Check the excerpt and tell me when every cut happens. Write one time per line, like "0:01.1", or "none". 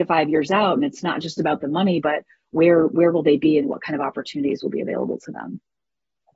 none